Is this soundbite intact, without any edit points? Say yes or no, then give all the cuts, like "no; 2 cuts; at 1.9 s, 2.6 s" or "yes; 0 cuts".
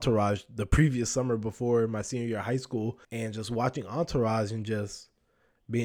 no; 1 cut; at 3.0 s